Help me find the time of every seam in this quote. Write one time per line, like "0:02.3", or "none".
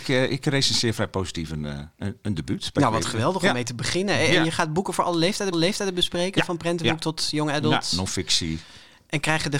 0:05.5